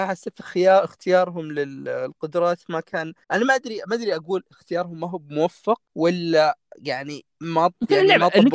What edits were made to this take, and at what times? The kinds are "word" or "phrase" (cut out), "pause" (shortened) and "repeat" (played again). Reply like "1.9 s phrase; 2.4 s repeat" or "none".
3.2 s pause; 5.9 s pause